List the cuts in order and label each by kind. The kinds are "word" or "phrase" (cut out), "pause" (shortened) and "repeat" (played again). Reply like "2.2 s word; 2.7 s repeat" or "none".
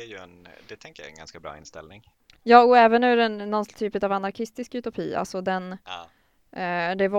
none